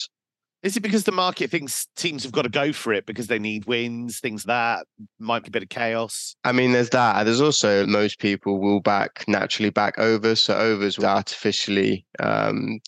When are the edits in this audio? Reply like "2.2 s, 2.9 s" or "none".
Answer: 4.4 s, 5.4 s, 7.8 s, 11.0 s